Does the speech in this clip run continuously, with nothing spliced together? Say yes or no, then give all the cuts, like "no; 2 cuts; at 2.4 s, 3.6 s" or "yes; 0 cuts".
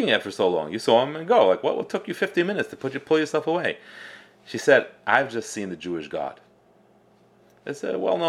yes; 0 cuts